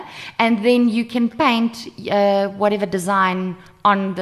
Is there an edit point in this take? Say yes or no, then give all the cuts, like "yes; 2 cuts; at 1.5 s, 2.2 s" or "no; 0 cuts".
no; 0 cuts